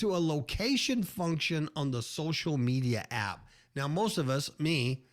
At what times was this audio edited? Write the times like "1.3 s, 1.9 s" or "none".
none